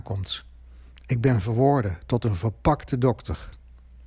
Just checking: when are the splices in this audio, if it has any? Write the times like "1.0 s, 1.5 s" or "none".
none

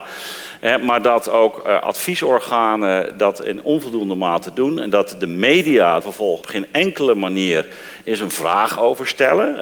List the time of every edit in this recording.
6.0 s, 6.4 s

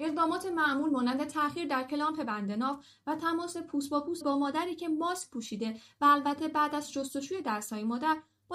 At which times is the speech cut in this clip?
4.2 s

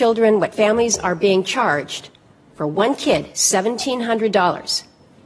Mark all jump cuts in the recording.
none

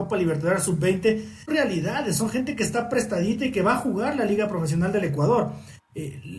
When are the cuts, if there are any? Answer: 1.5 s

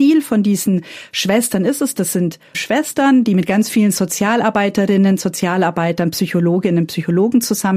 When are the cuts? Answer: 2.5 s

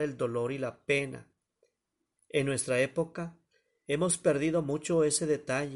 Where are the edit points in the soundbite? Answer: none

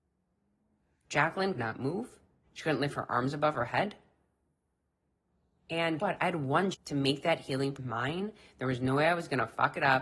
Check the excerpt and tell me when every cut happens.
1.5 s, 2.4 s, 6.0 s, 6.7 s, 7.7 s

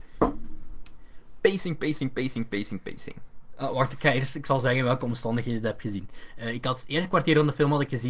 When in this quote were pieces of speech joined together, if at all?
none

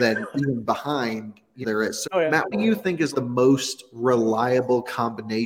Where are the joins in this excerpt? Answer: 1.6 s, 2.0 s, 2.5 s, 3.1 s

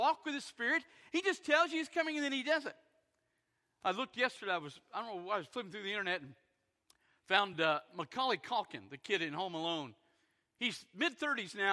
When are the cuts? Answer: none

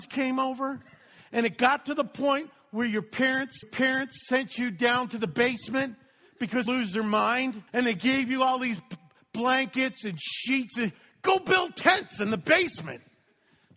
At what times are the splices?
3.6 s, 6.7 s, 7.7 s

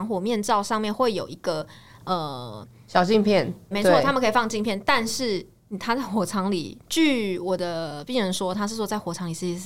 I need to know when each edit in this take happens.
3.7 s

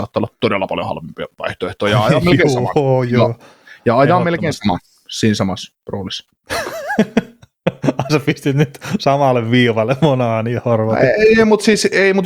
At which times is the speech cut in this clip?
none

